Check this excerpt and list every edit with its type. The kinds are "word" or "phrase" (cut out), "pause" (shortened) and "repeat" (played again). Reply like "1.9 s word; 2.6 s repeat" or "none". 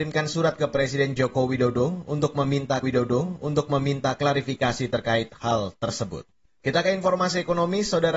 2.8 s repeat; 6.4 s pause